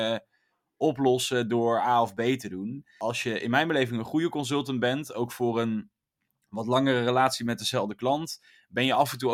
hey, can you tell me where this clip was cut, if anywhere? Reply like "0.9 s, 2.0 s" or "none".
none